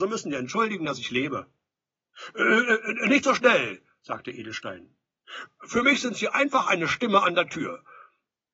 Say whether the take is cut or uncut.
uncut